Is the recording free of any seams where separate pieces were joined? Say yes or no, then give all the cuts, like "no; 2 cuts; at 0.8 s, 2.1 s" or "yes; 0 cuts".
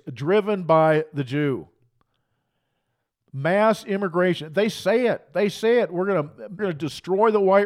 no; 1 cut; at 6.6 s